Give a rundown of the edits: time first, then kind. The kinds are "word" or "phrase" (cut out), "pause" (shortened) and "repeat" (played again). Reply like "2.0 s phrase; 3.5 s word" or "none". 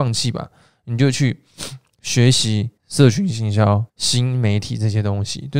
2.8 s pause; 3.9 s pause